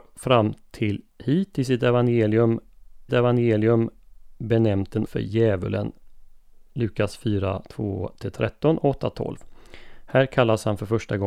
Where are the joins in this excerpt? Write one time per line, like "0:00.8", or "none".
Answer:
0:01.1
0:03.1
0:05.1